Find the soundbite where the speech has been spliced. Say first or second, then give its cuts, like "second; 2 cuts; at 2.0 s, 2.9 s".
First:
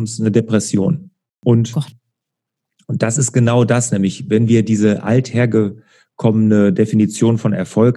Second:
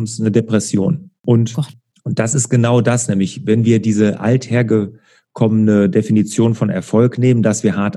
second; 2 cuts; at 1.2 s, 1.9 s